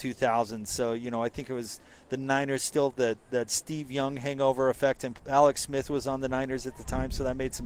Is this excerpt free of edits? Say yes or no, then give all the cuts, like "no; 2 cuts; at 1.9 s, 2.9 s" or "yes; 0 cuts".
yes; 0 cuts